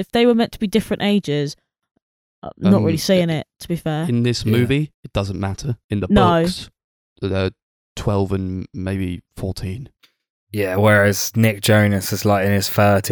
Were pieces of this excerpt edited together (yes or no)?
yes